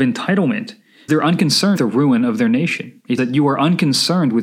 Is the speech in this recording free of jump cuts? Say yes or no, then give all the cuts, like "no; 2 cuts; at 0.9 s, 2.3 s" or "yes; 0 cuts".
no; 3 cuts; at 1.1 s, 1.8 s, 3.2 s